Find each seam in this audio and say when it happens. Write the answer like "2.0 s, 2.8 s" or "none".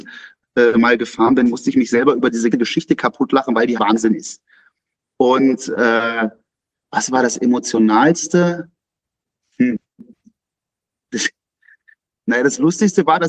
2.5 s, 3.8 s